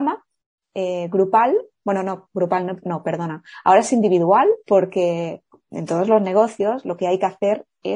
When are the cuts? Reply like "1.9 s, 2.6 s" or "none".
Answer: 4.6 s